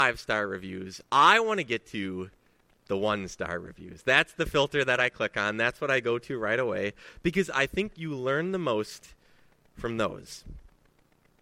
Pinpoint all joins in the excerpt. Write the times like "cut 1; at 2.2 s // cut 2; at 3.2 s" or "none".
none